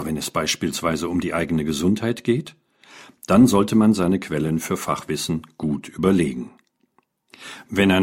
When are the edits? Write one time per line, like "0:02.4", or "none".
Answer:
none